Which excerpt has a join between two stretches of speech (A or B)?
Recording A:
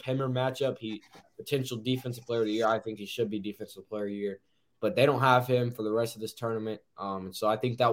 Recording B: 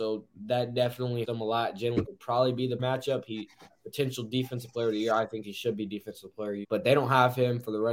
B